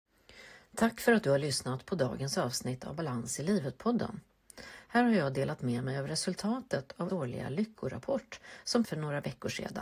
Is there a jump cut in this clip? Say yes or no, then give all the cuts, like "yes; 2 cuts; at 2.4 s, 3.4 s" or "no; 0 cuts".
yes; 2 cuts; at 7.1 s, 8.8 s